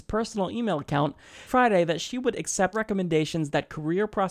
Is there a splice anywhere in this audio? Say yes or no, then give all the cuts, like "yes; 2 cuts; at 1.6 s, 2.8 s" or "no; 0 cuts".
yes; 2 cuts; at 1.5 s, 2.7 s